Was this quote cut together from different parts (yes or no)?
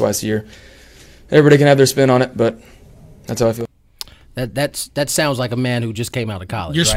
no